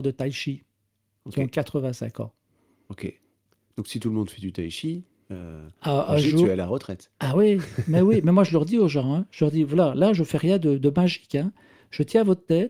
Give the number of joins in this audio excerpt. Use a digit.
0